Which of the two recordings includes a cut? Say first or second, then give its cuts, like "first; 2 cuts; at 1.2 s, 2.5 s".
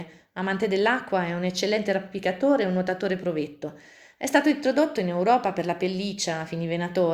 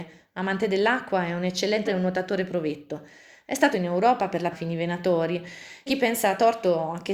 second; 4 cuts; at 1.9 s, 3.7 s, 4.5 s, 5.9 s